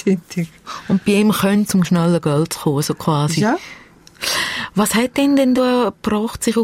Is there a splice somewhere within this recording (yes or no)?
yes